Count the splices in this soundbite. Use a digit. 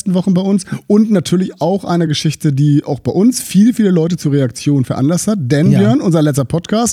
0